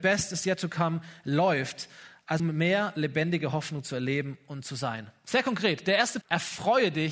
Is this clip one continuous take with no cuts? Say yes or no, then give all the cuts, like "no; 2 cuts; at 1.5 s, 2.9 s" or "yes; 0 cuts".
no; 2 cuts; at 2.4 s, 6.2 s